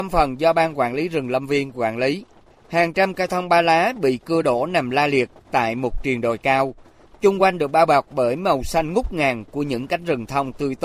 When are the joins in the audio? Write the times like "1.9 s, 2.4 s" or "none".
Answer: none